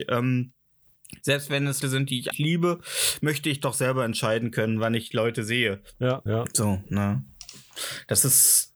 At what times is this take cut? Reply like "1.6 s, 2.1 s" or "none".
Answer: 1.8 s, 2.3 s, 6.3 s